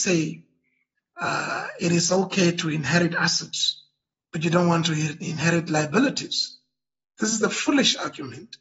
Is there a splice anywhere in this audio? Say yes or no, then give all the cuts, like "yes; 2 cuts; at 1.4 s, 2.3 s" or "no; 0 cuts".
no; 0 cuts